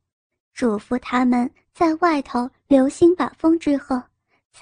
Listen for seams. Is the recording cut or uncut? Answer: uncut